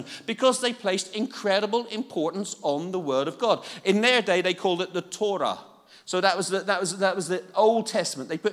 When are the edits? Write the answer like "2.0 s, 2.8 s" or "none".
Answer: none